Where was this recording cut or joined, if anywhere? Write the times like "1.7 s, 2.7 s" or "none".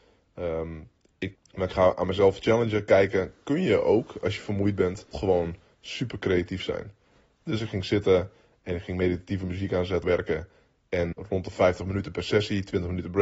1.4 s, 5.1 s, 10.0 s, 11.1 s

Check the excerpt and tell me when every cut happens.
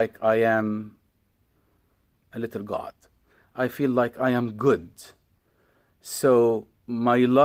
none

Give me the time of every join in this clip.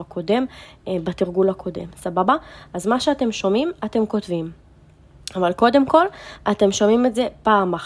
none

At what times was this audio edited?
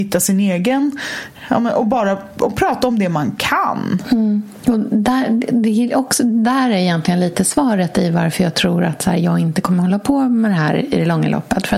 none

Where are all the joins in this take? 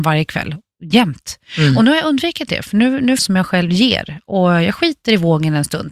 3.2 s

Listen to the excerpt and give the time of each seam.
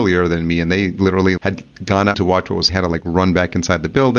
1.4 s, 2.1 s, 2.7 s

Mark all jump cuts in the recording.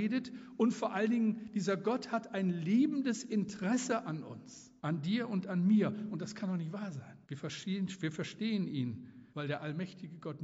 4.8 s, 7.2 s, 9.3 s

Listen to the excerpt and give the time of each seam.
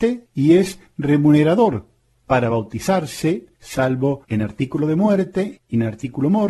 none

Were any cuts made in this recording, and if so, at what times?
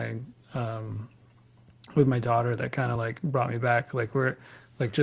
none

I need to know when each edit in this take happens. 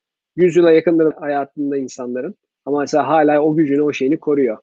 1.1 s

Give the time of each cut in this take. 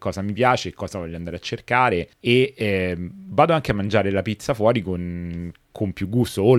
2.1 s

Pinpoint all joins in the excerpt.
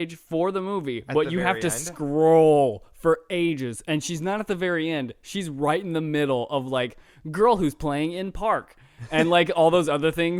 none

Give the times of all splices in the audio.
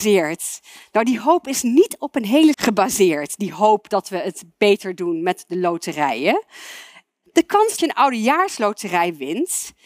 2.5 s, 7.8 s

